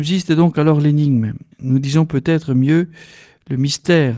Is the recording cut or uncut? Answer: cut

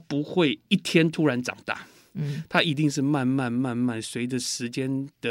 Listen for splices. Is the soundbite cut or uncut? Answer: uncut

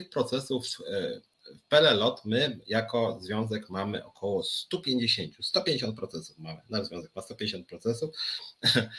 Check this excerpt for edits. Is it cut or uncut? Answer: uncut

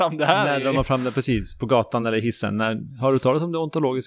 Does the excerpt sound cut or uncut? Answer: uncut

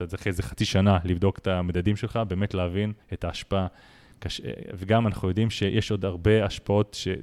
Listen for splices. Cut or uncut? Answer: cut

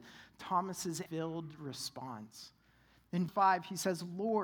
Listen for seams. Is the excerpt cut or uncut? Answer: cut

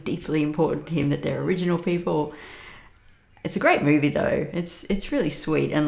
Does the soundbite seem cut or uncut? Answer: uncut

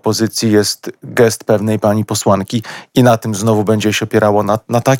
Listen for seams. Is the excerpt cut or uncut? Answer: uncut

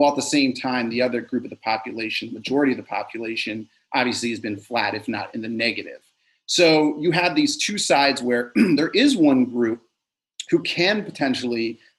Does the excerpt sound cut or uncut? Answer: uncut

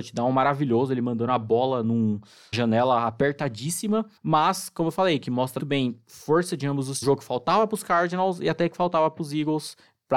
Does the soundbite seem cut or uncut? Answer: cut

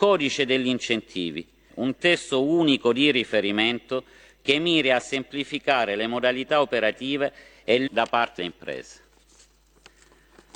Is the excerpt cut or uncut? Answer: cut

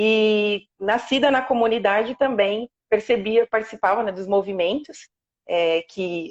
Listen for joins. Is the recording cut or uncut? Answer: uncut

